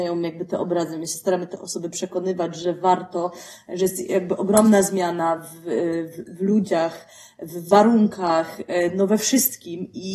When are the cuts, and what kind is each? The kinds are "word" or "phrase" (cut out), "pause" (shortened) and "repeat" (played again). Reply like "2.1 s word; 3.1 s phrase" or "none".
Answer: none